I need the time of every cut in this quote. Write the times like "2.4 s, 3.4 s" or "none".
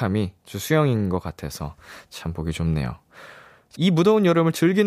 3.8 s